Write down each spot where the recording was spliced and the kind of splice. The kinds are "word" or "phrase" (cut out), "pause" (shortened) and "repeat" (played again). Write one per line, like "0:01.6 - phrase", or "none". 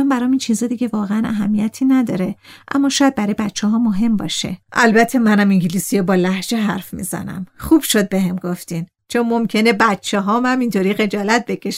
0:04.6 - pause